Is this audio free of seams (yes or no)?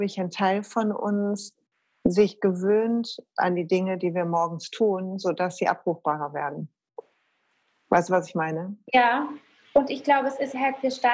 yes